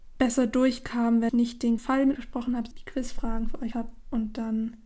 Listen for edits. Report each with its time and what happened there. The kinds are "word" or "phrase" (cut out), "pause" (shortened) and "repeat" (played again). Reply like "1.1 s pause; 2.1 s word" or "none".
1.3 s word; 1.8 s word; 2.1 s word; 2.7 s word; 3.7 s word